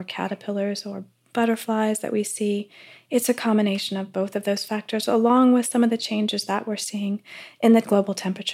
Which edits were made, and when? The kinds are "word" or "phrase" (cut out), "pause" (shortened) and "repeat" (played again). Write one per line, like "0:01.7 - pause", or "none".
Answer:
none